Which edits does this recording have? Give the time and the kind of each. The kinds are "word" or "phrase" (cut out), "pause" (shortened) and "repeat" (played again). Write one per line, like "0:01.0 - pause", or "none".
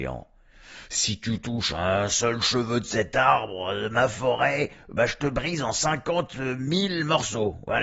none